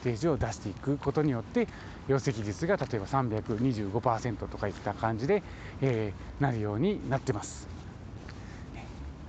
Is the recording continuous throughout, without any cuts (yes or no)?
yes